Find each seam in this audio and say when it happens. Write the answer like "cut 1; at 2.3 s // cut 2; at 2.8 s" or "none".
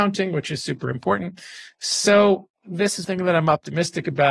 cut 1; at 3.0 s